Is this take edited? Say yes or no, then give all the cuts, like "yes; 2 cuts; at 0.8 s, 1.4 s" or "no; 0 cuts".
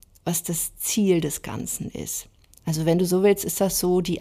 no; 0 cuts